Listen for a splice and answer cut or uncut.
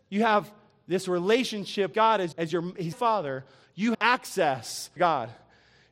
cut